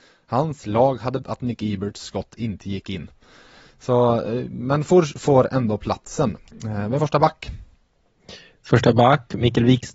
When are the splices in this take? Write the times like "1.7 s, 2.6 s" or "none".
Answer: 1.2 s, 7.0 s